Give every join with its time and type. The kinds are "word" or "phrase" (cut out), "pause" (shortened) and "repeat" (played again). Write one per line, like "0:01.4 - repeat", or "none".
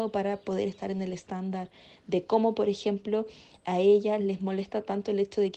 none